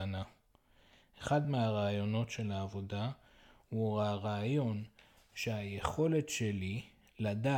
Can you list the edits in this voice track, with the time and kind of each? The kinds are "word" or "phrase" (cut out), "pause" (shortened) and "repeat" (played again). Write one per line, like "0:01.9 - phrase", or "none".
none